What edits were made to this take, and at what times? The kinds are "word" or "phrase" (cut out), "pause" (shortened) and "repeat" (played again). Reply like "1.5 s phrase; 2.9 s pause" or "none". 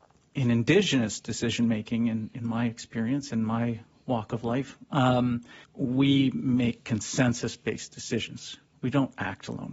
5.6 s pause